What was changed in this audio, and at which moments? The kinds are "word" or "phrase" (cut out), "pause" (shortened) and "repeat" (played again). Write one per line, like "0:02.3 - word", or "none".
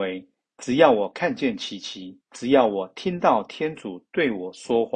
0:02.2 - pause

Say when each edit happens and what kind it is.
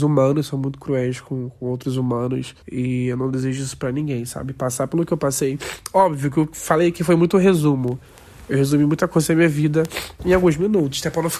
0:02.6 - pause

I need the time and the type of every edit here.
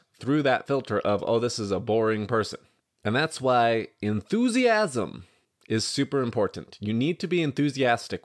none

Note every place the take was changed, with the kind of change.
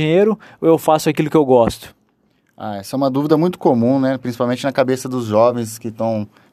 none

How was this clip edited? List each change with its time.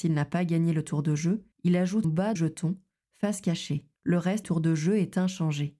0:01.5 - pause
0:02.0 - phrase
0:02.4 - phrase
0:04.0 - pause
0:04.4 - word

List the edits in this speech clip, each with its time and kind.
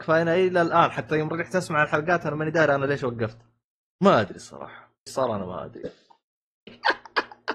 0:05.1 - word

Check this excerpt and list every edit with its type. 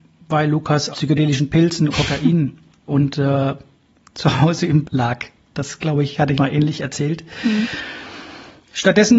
0:00.9 - word
0:01.9 - word
0:02.9 - word
0:04.8 - word
0:06.4 - word

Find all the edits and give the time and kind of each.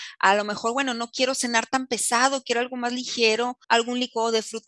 0:03.6 - pause

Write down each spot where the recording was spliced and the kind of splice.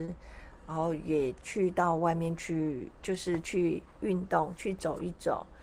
0:03.0 - pause

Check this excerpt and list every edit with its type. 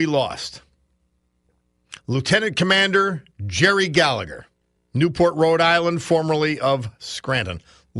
0:02.0 - pause
0:04.8 - pause

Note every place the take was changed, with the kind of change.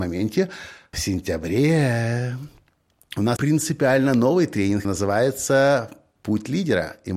0:00.9 - word
0:03.4 - word
0:04.8 - word

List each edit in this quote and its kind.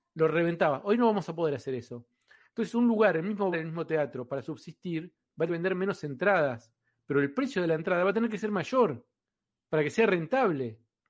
0:03.5 - word
0:05.5 - word

